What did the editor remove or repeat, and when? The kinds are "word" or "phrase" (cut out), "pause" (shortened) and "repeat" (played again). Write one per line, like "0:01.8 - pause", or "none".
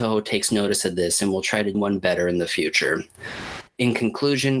0:01.7 - word